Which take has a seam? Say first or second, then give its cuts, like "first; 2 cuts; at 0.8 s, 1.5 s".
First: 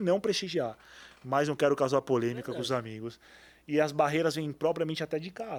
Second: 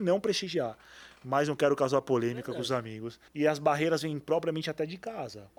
second; 1 cut; at 3.3 s